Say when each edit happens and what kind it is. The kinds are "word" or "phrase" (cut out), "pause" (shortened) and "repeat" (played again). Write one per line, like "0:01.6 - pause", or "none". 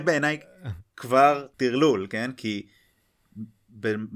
0:01.5 - pause